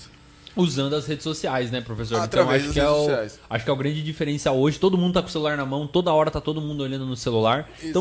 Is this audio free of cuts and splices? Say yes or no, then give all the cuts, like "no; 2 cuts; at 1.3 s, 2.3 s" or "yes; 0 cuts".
yes; 0 cuts